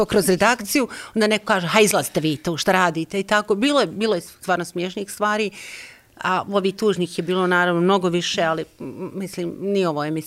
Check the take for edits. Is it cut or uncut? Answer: uncut